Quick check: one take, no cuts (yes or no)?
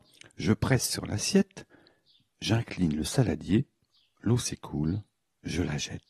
yes